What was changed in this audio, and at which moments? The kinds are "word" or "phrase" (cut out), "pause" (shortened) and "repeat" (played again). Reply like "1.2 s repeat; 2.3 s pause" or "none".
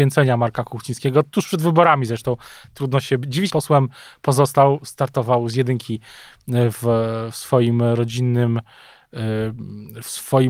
3.5 s phrase